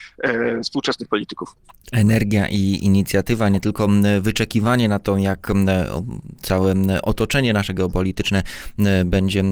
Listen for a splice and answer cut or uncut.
uncut